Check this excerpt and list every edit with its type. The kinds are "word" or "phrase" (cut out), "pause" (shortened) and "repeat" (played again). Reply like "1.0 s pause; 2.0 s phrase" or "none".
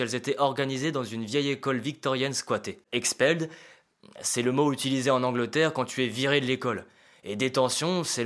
2.8 s pause